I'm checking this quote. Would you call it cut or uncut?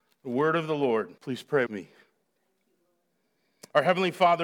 cut